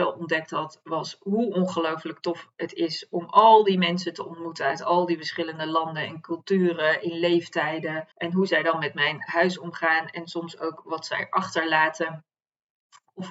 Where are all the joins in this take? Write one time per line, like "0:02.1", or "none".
0:08.1